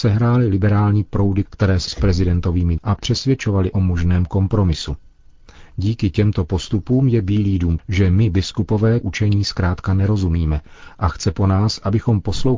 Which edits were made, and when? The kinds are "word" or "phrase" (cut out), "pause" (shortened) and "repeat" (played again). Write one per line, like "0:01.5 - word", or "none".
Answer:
0:01.4 - word
0:01.9 - word
0:02.8 - word
0:03.7 - word
0:07.8 - word
0:09.0 - word